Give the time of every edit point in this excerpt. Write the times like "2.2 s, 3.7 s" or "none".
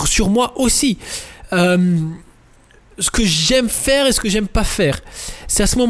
none